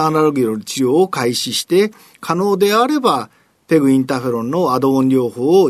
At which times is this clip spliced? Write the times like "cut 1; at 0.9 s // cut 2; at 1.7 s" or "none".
none